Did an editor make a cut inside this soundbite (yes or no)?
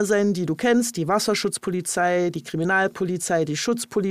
no